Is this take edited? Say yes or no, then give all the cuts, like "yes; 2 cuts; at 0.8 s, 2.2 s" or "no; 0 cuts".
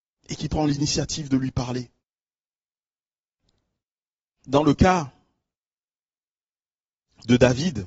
no; 0 cuts